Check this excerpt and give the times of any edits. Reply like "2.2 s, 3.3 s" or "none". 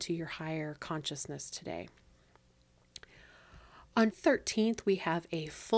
4.1 s